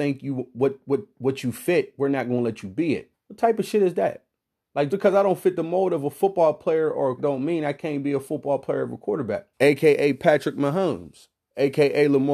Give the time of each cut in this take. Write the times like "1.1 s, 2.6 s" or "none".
3.1 s, 4.9 s, 7.2 s, 9.5 s